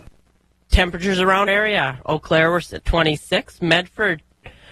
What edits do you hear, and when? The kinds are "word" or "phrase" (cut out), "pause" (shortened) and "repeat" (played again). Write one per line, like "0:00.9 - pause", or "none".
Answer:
0:01.5 - word
0:02.8 - word